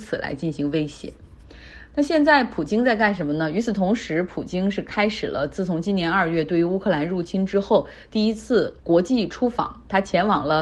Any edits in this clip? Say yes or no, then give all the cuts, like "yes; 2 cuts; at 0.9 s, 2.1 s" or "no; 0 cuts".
yes; 1 cut; at 8.8 s